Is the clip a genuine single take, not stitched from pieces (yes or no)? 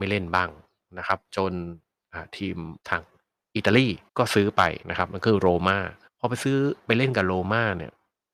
no